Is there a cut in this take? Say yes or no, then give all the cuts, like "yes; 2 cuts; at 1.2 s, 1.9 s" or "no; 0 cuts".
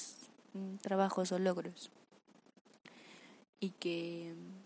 no; 0 cuts